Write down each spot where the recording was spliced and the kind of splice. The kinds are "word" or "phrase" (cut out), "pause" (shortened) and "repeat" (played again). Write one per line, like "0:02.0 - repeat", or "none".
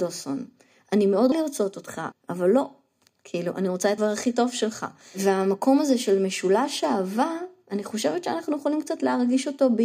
0:01.3 - word
0:02.1 - word
0:04.0 - word